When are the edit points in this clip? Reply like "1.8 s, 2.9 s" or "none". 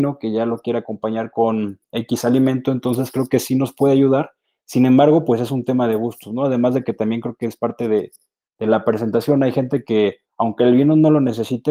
none